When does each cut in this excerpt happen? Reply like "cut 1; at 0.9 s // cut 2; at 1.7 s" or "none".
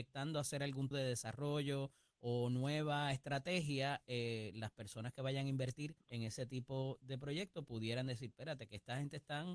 cut 1; at 0.9 s // cut 2; at 6.0 s